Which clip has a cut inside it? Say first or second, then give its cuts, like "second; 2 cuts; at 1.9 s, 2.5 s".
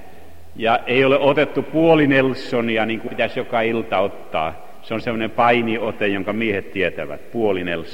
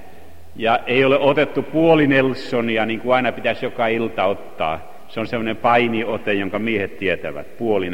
first; 1 cut; at 3.1 s